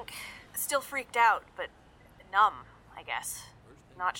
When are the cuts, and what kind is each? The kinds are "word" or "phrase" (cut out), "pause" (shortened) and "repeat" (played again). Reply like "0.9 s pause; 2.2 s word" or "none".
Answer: none